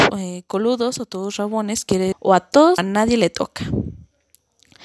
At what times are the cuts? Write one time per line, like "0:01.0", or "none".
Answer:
0:02.1
0:02.8

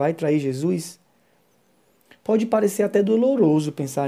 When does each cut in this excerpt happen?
none

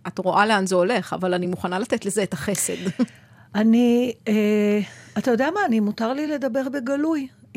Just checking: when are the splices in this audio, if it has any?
none

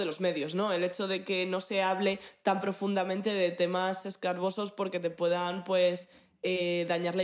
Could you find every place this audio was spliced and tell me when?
none

